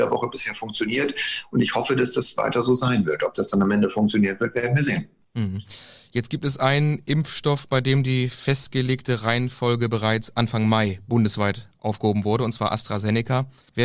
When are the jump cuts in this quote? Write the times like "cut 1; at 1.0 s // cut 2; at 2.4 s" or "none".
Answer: none